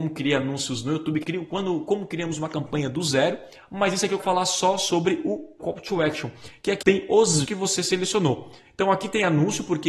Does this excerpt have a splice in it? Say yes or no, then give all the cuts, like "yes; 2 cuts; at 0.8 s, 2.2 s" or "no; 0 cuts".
yes; 5 cuts; at 1.2 s, 4.2 s, 5.6 s, 6.8 s, 7.4 s